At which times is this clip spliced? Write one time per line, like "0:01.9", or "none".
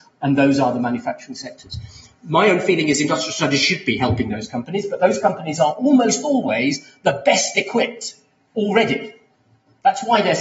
none